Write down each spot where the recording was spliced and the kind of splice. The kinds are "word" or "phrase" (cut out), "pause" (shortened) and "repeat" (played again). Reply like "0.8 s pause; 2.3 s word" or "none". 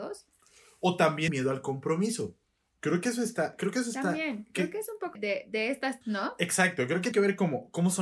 1.3 s word; 5.1 s word; 6.0 s word; 7.1 s word